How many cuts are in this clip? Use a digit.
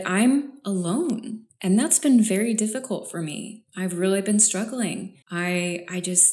1